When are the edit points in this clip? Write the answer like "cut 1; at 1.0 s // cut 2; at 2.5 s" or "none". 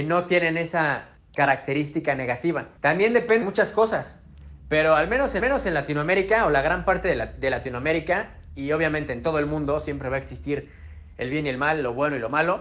cut 1; at 1.2 s // cut 2; at 2.8 s // cut 3; at 3.4 s // cut 4; at 5.4 s